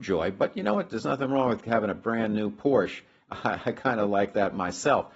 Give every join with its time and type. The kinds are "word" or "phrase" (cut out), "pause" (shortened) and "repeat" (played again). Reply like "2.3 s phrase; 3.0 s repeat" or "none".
none